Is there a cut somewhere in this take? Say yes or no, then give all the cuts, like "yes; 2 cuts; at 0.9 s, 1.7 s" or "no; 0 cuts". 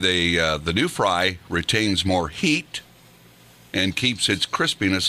no; 0 cuts